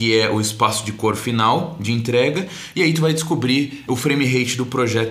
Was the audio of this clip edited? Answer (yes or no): yes